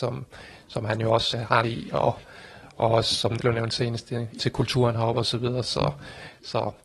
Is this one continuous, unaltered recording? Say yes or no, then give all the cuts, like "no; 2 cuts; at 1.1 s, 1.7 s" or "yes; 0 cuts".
no; 4 cuts; at 1.3 s, 1.6 s, 3.4 s, 4.4 s